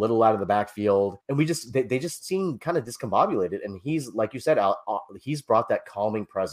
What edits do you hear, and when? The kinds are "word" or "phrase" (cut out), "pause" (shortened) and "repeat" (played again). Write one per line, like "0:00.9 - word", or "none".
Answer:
0:01.2 - pause